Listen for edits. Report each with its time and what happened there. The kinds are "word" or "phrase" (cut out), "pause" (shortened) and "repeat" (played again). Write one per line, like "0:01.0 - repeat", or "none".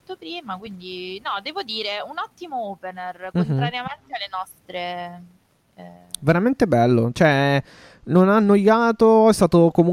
none